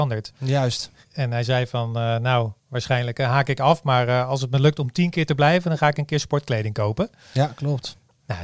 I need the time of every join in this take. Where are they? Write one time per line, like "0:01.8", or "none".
0:02.6